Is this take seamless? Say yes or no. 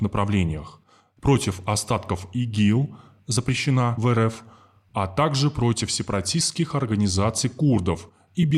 yes